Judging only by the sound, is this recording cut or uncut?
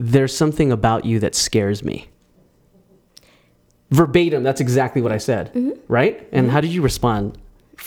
uncut